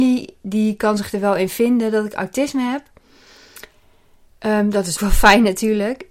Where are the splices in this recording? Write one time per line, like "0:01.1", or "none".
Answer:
0:05.0